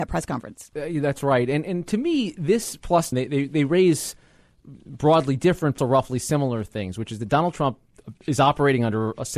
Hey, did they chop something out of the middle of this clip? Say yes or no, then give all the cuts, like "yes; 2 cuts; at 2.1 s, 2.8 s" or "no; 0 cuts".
yes; 2 cuts; at 3.1 s, 5.8 s